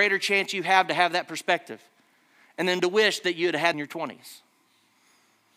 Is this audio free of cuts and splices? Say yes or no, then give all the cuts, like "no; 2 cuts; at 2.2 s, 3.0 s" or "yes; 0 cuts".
no; 1 cut; at 3.7 s